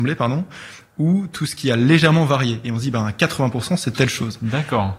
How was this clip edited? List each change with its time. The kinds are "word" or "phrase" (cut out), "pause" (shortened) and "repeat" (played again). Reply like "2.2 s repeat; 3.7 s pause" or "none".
none